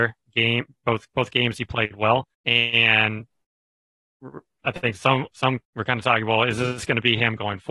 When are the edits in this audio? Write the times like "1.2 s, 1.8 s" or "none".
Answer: 2.3 s, 5.6 s